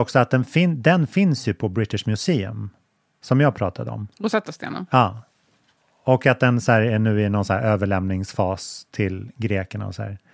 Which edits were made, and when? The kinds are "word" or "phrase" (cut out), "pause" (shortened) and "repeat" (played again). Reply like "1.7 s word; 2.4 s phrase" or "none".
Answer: 4.1 s pause